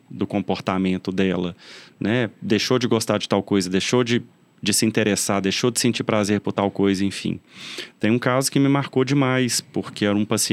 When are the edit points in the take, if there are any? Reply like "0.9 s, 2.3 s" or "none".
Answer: none